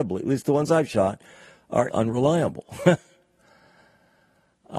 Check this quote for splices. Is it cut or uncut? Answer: cut